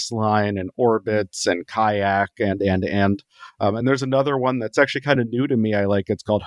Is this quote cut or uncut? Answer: uncut